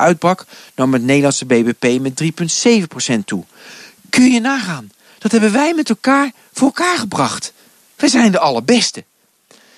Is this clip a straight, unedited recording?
yes; 0 cuts

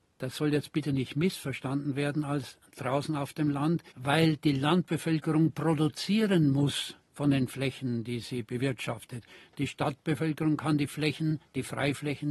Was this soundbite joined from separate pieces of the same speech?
yes; 1 cut; at 3.9 s

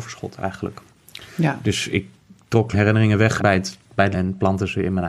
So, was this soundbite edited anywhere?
yes; 3 cuts; at 2.7 s, 3.4 s, 4.1 s

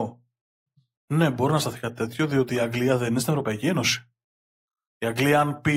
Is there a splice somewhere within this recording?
no; 0 cuts

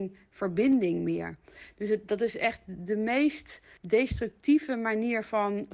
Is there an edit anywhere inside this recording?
yes; 1 cut; at 3.8 s

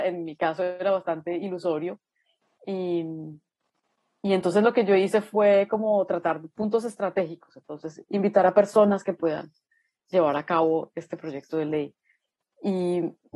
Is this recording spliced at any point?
no; 0 cuts

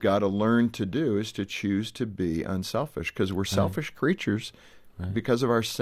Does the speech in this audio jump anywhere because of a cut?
no; 0 cuts

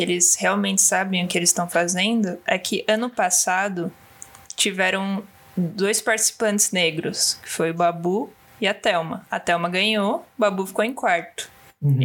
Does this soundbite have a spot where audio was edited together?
no; 0 cuts

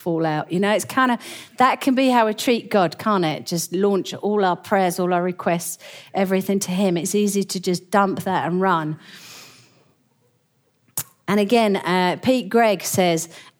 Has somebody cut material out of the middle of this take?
no; 0 cuts

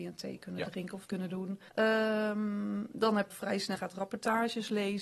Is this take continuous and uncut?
no; 4 cuts; at 1.1 s, 1.7 s, 3.3 s, 3.8 s

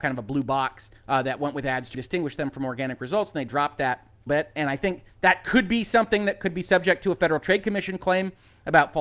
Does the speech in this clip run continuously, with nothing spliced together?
no; 4 cuts; at 1.0 s, 1.9 s, 4.3 s, 5.1 s

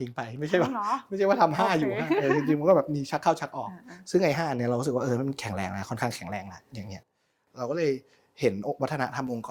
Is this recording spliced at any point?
no; 0 cuts

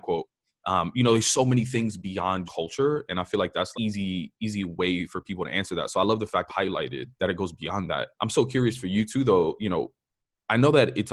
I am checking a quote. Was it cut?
yes; 5 cuts; at 2.5 s, 3.7 s, 6.5 s, 7.1 s, 8.1 s

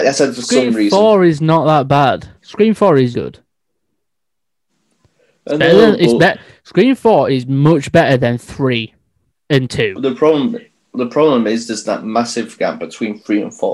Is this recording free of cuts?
no; 2 cuts; at 2.4 s, 3.1 s

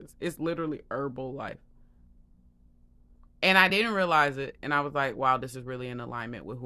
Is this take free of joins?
yes; 0 cuts

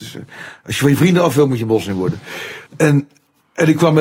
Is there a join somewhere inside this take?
yes; 1 cut; at 2.7 s

